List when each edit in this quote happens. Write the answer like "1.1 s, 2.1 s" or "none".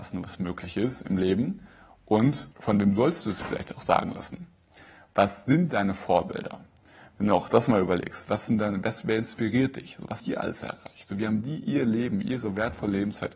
2.5 s, 10.2 s